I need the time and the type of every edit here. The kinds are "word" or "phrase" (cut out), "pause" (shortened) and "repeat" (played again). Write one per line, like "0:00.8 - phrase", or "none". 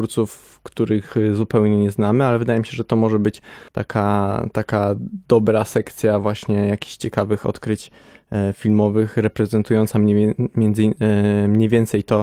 0:03.7 - pause